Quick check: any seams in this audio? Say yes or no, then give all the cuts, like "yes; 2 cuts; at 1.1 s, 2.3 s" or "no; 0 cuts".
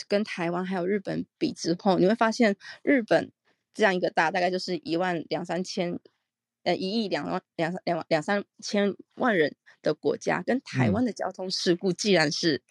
no; 0 cuts